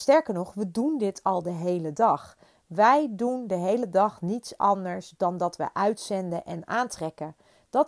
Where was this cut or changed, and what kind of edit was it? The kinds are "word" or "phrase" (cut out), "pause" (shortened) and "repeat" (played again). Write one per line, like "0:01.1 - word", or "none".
none